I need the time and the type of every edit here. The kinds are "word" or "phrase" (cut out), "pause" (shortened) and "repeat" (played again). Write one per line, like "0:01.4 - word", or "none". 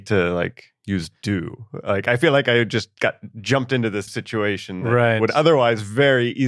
0:01.2 - pause
0:04.1 - word